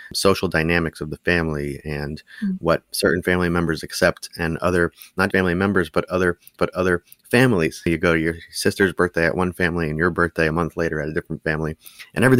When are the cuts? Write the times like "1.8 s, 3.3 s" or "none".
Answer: 5.3 s, 6.6 s